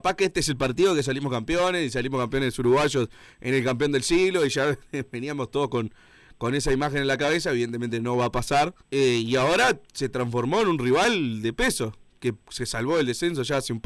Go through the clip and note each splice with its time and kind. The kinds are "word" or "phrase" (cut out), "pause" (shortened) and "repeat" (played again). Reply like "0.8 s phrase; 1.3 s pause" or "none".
8.8 s pause; 12.4 s pause